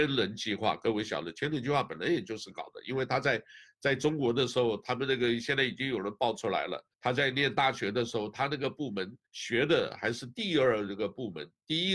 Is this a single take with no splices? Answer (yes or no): no